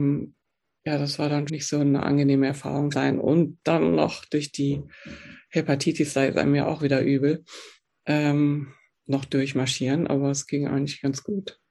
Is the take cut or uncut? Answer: cut